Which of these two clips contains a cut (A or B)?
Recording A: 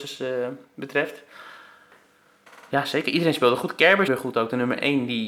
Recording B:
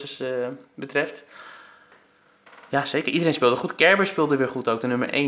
A